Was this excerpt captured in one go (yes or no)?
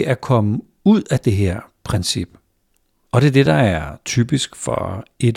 yes